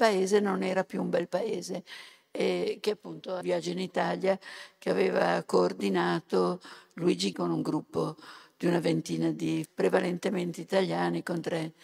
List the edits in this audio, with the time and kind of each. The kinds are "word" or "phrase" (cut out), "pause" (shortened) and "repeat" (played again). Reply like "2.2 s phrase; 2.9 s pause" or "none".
3.4 s word; 7.3 s word; 9.6 s word